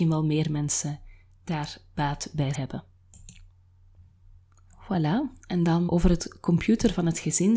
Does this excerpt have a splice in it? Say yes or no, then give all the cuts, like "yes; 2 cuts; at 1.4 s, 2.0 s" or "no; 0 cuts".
yes; 2 cuts; at 2.5 s, 5.9 s